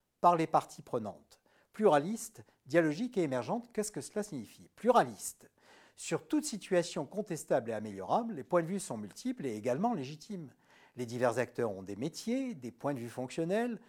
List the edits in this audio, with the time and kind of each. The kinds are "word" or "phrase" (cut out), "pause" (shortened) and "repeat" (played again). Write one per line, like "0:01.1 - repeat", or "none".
none